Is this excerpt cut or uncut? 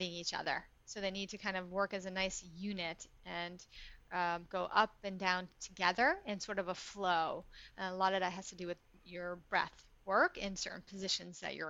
uncut